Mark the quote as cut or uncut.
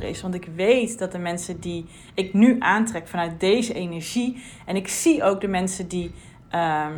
uncut